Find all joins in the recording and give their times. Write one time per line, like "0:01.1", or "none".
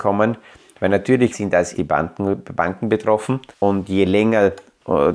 0:01.3
0:01.7
0:03.5